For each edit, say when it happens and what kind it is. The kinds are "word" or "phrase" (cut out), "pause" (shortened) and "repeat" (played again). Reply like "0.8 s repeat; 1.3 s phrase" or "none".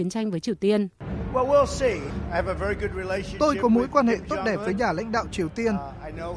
none